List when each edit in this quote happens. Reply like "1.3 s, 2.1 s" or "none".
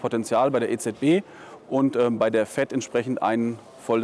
none